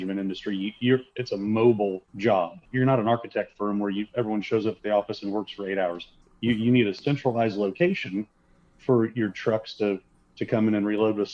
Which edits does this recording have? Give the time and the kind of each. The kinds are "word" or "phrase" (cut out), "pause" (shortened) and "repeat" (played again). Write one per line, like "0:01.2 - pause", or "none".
none